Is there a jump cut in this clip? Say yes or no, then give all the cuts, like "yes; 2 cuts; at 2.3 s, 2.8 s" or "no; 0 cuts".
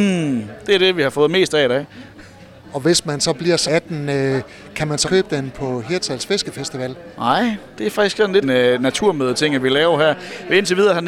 yes; 3 cuts; at 3.7 s, 5.0 s, 8.4 s